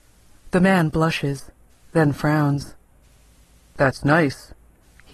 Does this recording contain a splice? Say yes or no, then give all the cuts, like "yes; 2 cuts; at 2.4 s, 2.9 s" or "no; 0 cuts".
no; 0 cuts